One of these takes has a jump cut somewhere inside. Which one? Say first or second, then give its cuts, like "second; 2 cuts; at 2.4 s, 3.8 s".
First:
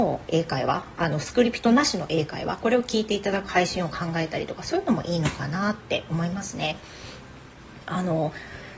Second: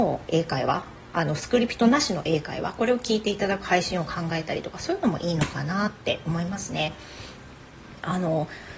first; 1 cut; at 0.9 s